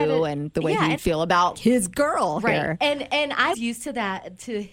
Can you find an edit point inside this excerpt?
yes; 3 cuts; at 1.0 s, 1.5 s, 3.5 s

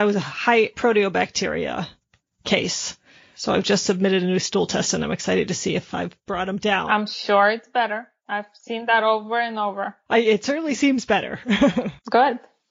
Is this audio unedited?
yes; 0 cuts

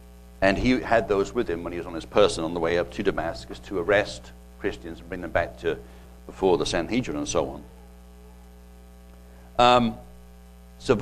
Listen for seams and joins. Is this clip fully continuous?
yes; 0 cuts

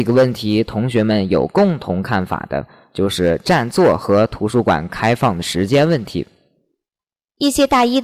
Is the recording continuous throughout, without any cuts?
yes; 0 cuts

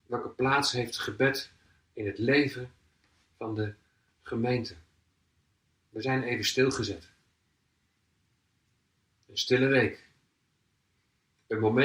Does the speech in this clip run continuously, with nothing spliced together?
yes; 0 cuts

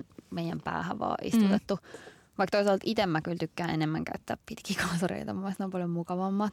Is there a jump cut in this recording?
no; 0 cuts

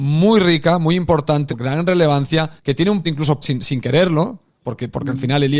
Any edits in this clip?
yes; 4 cuts; at 1.5 s, 2.6 s, 3.0 s, 3.4 s

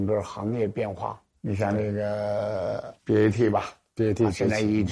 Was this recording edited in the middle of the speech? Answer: yes; 1 cut; at 3.0 s

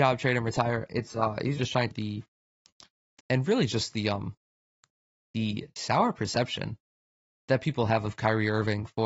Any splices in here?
yes; 3 cuts; at 1.6 s, 1.9 s, 3.2 s

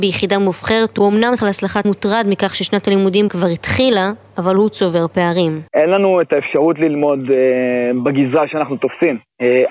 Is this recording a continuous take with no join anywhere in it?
no; 4 cuts; at 1.4 s, 1.8 s, 3.3 s, 5.7 s

